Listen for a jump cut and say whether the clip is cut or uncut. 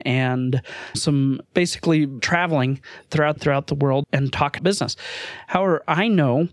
cut